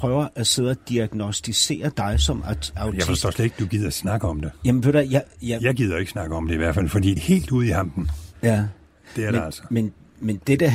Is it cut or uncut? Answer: cut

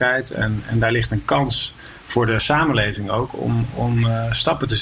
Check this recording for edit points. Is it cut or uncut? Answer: uncut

